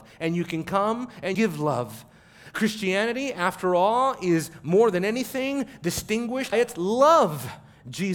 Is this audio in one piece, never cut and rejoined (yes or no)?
no